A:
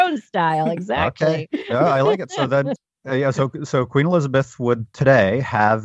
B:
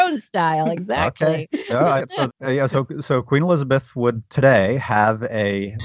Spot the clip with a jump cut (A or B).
B